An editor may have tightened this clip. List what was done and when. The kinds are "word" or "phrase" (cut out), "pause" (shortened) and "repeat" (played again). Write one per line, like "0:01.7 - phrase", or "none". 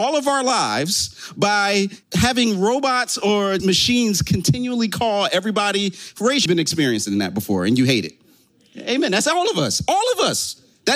0:02.0 - pause
0:03.6 - word
0:06.5 - phrase